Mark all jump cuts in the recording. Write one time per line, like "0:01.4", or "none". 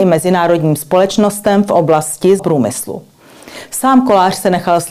0:02.4